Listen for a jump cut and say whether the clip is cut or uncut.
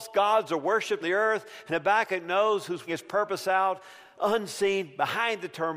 cut